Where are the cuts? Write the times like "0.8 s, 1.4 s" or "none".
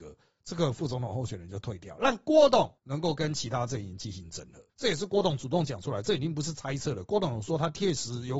2.8 s, 4.7 s